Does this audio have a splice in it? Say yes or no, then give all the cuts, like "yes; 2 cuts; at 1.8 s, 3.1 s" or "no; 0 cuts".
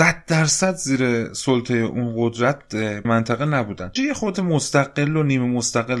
yes; 3 cuts; at 3.0 s, 4.0 s, 4.3 s